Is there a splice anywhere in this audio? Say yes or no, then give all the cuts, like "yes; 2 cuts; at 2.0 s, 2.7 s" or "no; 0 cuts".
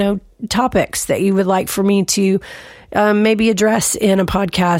no; 0 cuts